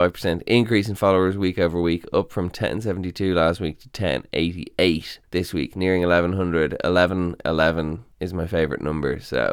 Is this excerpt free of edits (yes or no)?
no